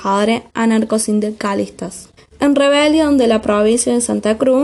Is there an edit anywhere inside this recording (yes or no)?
yes